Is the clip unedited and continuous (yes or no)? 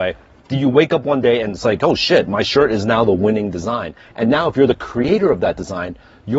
yes